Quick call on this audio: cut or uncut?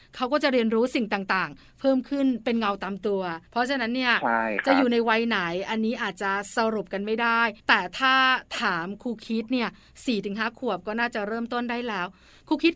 cut